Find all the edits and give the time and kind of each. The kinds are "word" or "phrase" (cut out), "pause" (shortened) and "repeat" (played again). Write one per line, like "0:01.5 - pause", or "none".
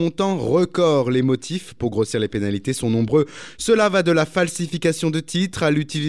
none